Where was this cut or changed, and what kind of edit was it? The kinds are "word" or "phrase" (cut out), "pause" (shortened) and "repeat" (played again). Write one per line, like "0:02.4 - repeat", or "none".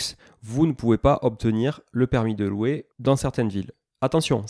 0:02.9 - pause